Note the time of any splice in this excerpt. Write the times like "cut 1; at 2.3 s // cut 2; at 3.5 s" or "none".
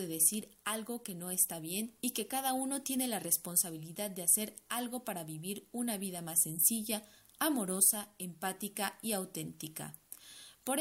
none